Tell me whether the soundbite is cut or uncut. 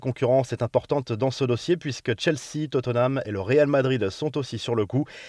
uncut